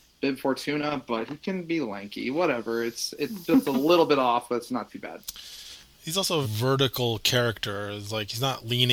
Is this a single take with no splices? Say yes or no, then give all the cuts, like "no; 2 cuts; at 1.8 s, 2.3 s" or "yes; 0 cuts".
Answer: no; 1 cut; at 6.4 s